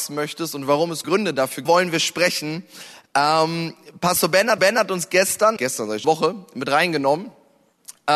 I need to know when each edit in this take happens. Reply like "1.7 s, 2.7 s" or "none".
1.0 s, 1.7 s, 4.6 s, 5.6 s, 6.0 s

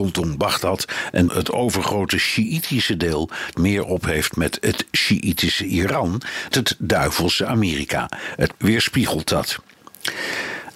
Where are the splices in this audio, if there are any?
1.3 s, 3.5 s, 6.5 s, 8.6 s

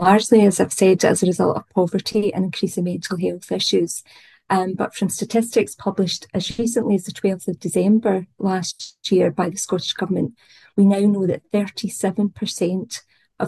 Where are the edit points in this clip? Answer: none

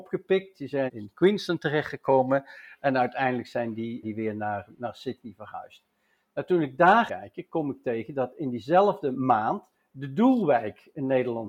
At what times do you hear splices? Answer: 4.0 s, 7.1 s

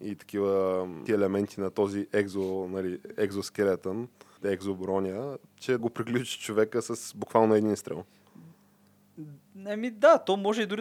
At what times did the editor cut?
1.1 s, 4.4 s, 5.8 s

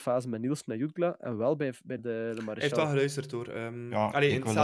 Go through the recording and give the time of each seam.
2.0 s

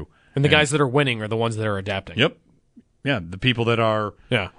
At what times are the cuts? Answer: none

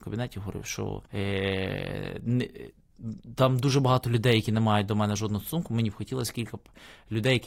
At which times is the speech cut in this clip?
1.0 s

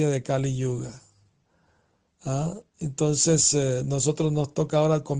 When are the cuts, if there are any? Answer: none

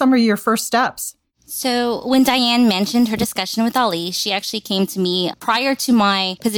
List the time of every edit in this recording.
none

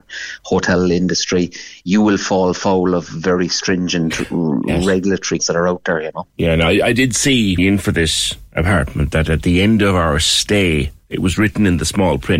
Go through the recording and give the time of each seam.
5.4 s, 7.6 s

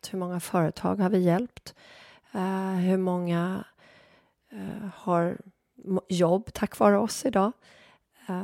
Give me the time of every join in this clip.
none

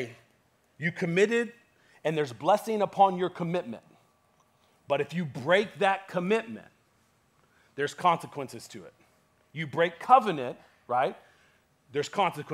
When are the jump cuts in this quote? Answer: none

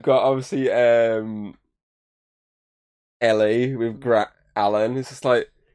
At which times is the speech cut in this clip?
4.0 s

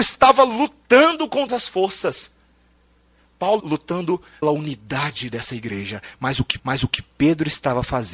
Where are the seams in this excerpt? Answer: 1.5 s, 3.6 s, 4.4 s, 6.6 s

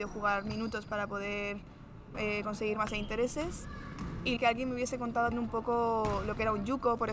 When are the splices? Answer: 2.1 s, 2.9 s, 4.4 s, 5.3 s

